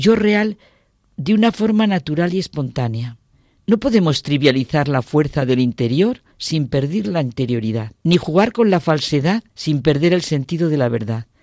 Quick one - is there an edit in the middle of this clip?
yes; 4 cuts; at 3.3 s, 6.3 s, 8.0 s, 9.5 s

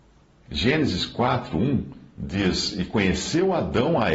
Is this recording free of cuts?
yes; 0 cuts

